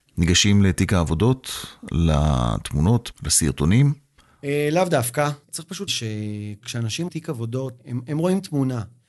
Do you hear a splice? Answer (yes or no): yes